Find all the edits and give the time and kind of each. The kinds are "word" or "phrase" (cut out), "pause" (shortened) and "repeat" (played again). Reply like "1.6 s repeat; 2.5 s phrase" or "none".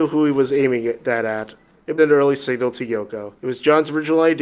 2.0 s phrase; 3.4 s pause